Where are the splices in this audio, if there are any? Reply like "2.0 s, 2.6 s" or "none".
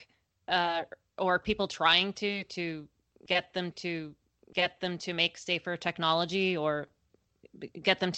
3.7 s